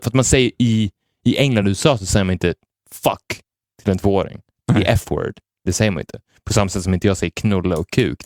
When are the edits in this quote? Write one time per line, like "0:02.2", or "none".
none

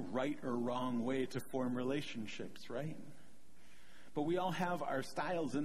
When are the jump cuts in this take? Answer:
none

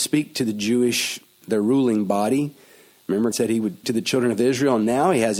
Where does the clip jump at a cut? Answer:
0:01.4
0:03.3
0:03.8

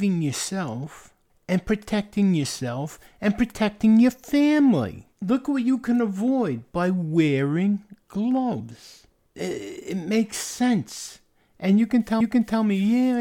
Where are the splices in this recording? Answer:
0:05.1
0:12.2

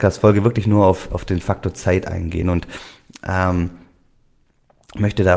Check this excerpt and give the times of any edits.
none

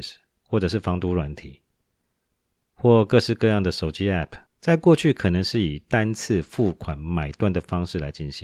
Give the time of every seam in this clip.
0:04.5

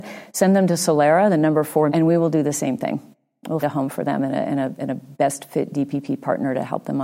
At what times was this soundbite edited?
0:01.9
0:03.6

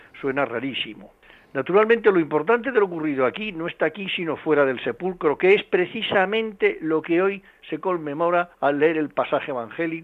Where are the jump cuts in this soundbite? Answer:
0:01.2
0:08.5

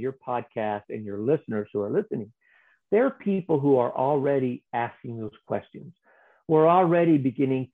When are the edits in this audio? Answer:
none

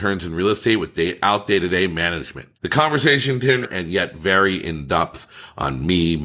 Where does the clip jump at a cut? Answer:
0:02.5
0:03.6

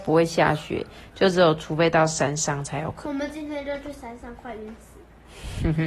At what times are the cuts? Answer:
none

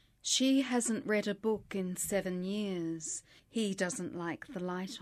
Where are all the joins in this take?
0:03.4

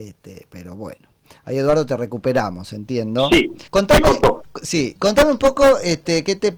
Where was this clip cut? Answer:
0:03.7

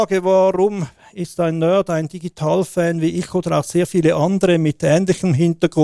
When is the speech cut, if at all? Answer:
none

